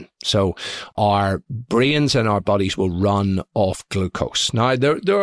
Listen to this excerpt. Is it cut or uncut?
uncut